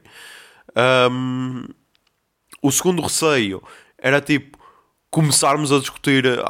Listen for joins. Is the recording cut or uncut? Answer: uncut